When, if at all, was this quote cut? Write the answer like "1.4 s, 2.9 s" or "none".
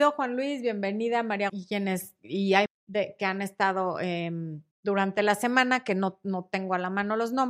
1.5 s, 2.7 s, 4.7 s